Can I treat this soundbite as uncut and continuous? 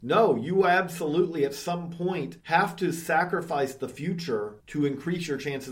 no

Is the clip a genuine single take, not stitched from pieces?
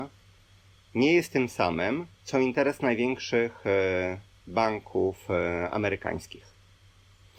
no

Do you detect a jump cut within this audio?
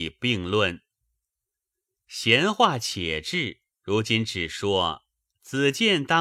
yes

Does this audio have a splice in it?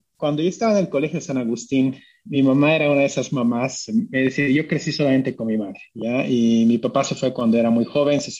no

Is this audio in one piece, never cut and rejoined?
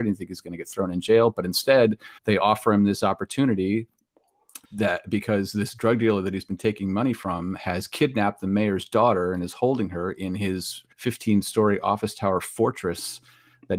no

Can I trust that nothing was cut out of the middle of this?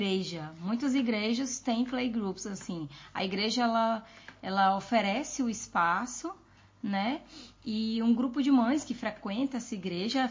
yes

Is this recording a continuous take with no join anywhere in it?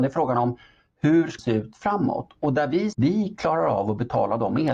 no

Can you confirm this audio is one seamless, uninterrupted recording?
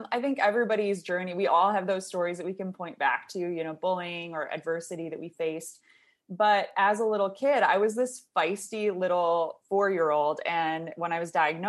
yes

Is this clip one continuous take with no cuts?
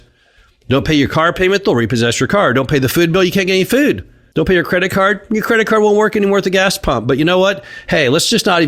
yes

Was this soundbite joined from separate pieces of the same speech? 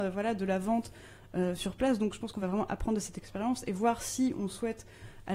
no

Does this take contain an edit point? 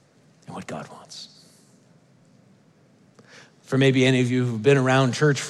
no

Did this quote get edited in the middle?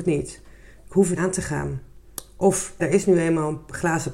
yes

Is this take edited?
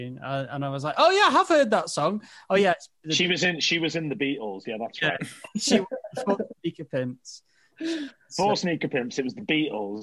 no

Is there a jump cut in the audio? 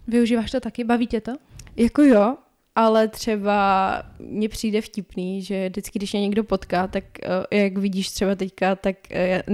no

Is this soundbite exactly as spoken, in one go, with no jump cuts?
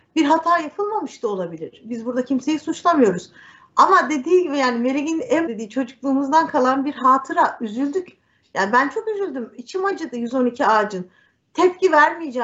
no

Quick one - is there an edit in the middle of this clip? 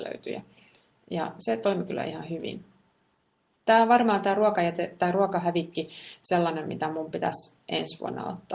no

